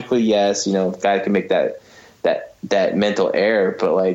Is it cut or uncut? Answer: cut